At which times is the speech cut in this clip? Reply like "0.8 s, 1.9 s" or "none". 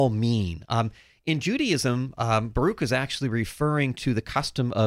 none